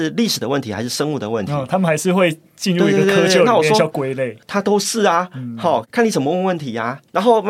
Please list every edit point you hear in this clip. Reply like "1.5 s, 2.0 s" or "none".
none